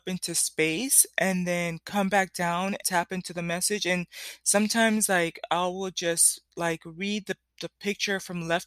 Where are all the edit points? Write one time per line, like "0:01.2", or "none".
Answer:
0:02.8

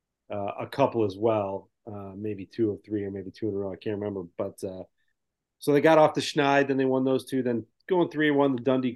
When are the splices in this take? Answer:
none

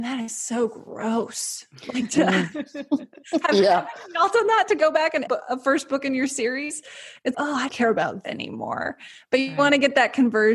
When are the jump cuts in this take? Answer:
0:05.3
0:07.3
0:07.7
0:08.2

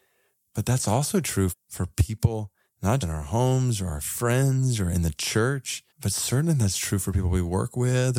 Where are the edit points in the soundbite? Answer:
0:01.5
0:03.0
0:05.9

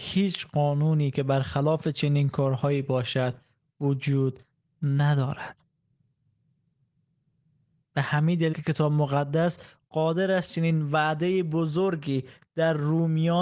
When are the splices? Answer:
0:08.5

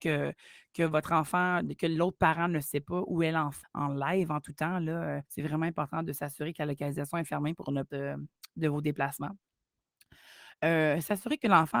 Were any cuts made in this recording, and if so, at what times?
0:01.8
0:03.6
0:05.3
0:07.9

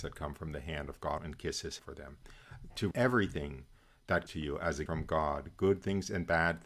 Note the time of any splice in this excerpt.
0:01.2
0:01.8
0:02.9
0:04.3
0:04.9

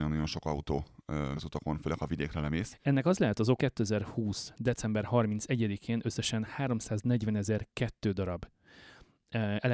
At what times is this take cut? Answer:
0:01.3
0:03.6

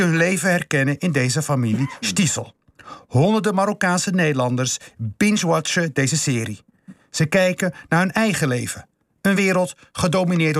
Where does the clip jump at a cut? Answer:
none

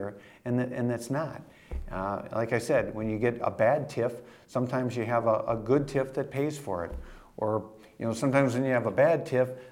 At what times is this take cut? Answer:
none

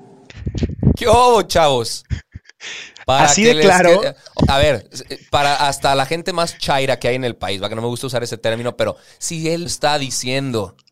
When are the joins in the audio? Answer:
0:04.4
0:09.7

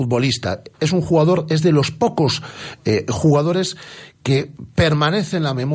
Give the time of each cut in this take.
0:04.1

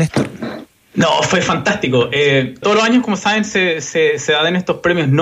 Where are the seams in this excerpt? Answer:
0:02.6

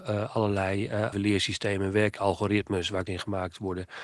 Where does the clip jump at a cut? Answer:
0:01.1
0:02.2
0:03.1

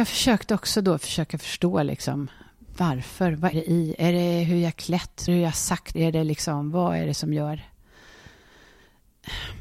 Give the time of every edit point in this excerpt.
0:03.5
0:05.3
0:05.9

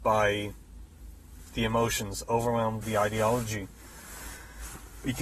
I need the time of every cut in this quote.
0:02.8

